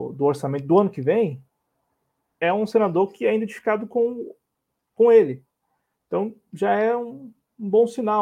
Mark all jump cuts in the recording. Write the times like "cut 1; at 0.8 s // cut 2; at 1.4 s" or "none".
none